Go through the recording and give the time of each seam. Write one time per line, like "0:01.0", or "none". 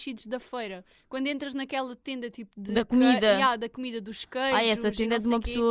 none